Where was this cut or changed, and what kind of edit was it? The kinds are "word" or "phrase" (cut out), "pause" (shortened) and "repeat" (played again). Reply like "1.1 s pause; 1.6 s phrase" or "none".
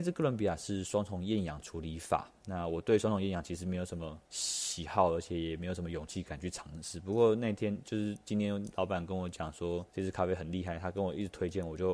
4.2 s pause; 9.9 s pause